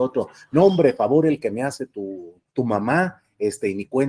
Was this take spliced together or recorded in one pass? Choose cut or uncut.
cut